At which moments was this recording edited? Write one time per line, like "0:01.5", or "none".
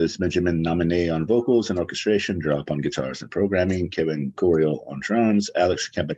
none